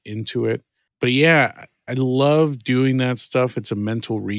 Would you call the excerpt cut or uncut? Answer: cut